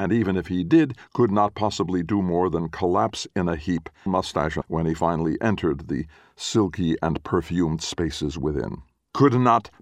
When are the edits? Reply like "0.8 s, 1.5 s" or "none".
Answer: 4.1 s, 4.6 s